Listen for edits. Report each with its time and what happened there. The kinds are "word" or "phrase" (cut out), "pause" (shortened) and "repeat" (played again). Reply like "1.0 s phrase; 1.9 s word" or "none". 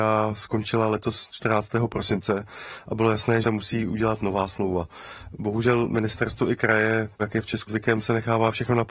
3.4 s phrase; 7.7 s word